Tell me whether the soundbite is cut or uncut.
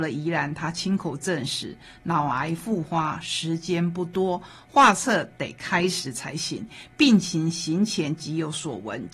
uncut